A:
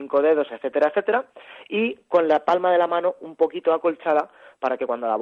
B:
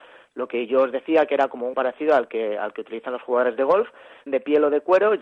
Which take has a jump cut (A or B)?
B